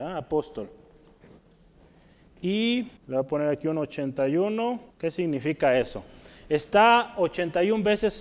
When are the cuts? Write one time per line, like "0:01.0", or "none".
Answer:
0:03.0
0:04.9